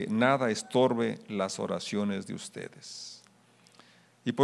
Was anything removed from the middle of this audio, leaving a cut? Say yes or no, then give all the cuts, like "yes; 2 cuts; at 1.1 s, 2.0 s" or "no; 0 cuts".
no; 0 cuts